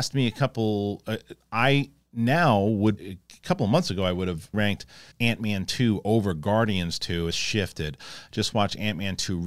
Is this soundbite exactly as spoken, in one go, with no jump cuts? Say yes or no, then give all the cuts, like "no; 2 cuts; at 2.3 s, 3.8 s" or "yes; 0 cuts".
no; 4 cuts; at 3.0 s, 4.5 s, 5.1 s, 7.3 s